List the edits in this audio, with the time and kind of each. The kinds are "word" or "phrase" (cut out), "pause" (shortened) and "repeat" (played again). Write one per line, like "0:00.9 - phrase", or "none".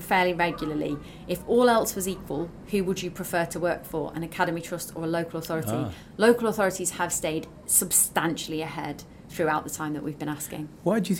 none